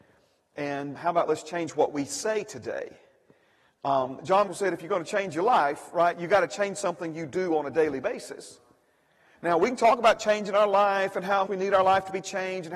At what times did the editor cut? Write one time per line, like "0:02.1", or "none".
0:01.0
0:04.5
0:11.5